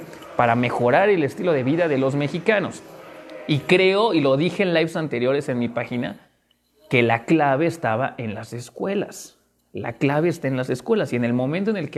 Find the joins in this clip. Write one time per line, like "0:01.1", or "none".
none